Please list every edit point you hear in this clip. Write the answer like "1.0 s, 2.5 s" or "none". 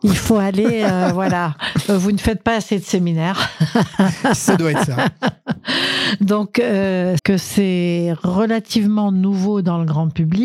7.2 s